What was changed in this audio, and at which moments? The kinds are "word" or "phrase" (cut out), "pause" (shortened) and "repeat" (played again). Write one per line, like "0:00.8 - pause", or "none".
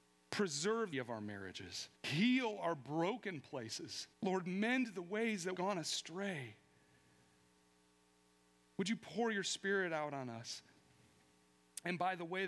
0:00.9 - phrase
0:01.9 - pause
0:04.1 - pause
0:05.5 - word